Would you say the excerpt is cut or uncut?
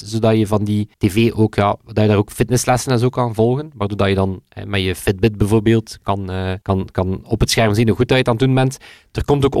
cut